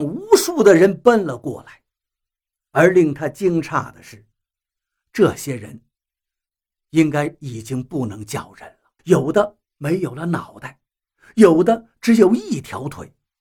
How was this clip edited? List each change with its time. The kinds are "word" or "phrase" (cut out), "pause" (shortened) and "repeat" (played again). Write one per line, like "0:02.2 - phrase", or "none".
0:09.0 - pause

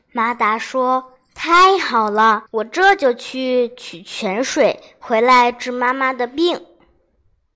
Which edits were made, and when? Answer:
0:01.2 - pause
0:02.5 - pause

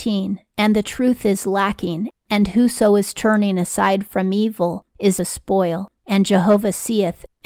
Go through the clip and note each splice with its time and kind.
0:05.2 - phrase

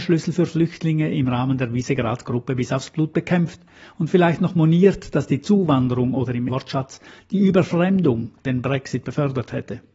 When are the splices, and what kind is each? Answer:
0:06.5 - word

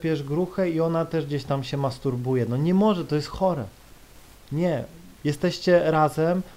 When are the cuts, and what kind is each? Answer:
0:05.1 - pause

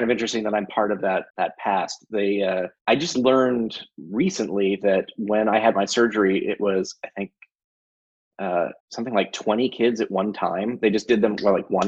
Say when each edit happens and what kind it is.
0:01.3 - pause
0:02.8 - pause
0:08.8 - pause

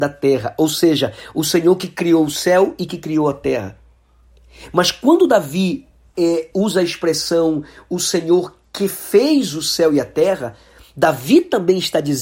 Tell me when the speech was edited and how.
none

